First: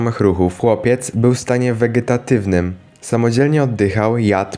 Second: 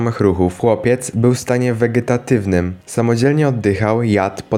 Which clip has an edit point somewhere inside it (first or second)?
second